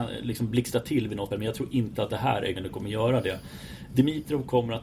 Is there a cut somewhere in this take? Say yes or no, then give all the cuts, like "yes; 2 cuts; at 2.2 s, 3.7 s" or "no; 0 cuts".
yes; 2 cuts; at 1.3 s, 2.6 s